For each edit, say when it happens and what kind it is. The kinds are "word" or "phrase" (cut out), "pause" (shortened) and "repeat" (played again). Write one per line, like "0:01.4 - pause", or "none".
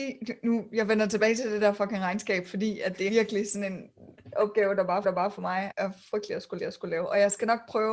0:03.1 - word
0:05.0 - repeat
0:05.7 - word
0:06.6 - repeat